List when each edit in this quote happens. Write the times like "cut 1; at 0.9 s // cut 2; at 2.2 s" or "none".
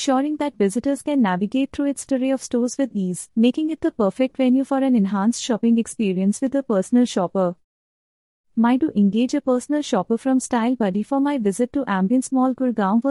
cut 1; at 2.1 s // cut 2; at 8.8 s